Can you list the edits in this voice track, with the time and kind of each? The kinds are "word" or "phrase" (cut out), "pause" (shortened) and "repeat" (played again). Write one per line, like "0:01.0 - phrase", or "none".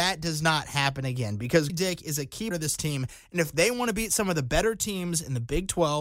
0:01.7 - word
0:02.5 - word